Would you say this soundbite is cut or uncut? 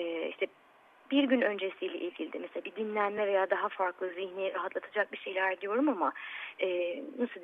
uncut